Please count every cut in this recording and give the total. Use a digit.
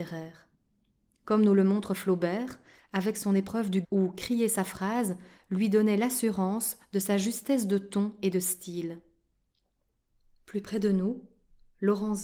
1